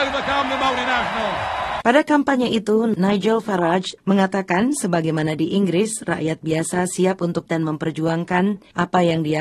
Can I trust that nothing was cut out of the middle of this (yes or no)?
no